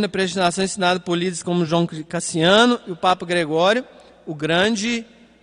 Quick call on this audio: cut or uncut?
uncut